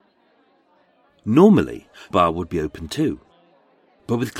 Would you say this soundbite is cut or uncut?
cut